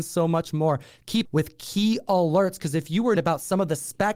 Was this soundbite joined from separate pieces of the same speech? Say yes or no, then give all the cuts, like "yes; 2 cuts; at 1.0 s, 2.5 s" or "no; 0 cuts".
yes; 2 cuts; at 1.2 s, 3.2 s